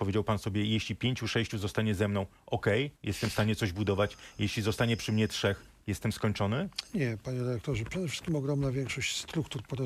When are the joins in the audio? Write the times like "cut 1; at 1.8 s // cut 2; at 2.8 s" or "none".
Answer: cut 1; at 3.0 s